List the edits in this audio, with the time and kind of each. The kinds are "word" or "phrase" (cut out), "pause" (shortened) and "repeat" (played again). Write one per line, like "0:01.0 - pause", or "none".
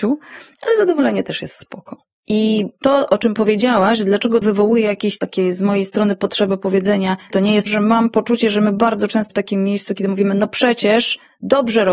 0:02.2 - pause
0:04.4 - word
0:07.3 - word
0:07.7 - phrase
0:09.3 - word